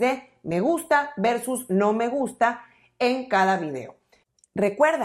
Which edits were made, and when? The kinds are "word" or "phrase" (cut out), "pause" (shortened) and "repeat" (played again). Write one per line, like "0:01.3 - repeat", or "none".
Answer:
none